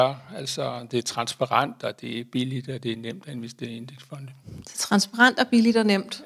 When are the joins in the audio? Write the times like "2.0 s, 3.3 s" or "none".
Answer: none